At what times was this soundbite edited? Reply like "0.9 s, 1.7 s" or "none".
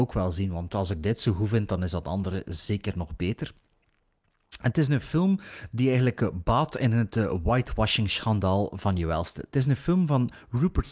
none